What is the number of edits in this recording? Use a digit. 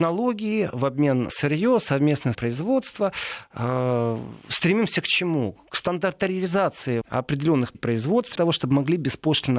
5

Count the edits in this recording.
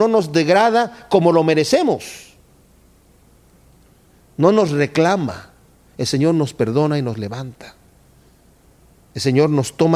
0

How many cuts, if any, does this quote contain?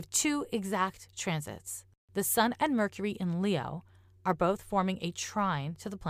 0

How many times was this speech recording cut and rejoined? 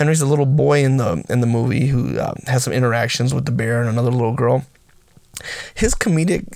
0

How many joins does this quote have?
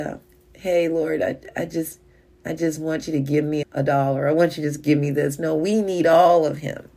1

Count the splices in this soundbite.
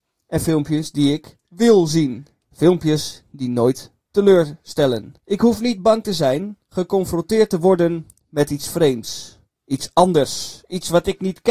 3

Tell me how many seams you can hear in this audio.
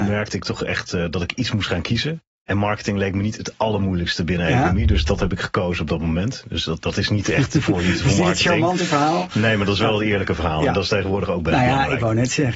0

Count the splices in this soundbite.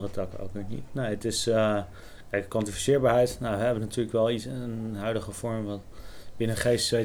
0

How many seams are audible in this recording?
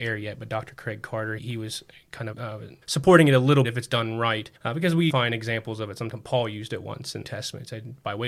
7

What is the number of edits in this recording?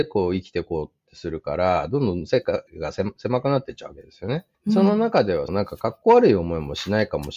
3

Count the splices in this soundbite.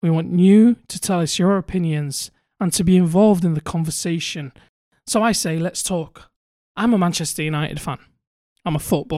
0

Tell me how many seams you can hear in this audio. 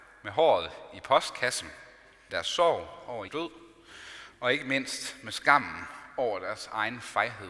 2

